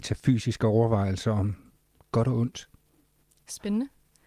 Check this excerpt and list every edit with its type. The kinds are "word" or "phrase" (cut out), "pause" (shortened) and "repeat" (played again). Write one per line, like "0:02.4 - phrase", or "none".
none